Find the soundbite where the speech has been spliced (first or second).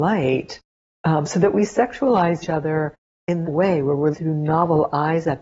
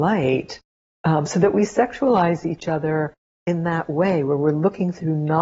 first